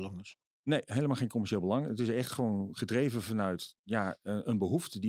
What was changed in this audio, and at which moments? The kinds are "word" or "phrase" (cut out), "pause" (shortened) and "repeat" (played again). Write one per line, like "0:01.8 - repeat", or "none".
none